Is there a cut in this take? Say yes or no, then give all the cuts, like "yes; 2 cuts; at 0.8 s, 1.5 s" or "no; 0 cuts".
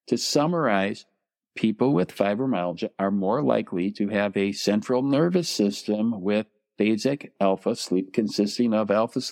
no; 0 cuts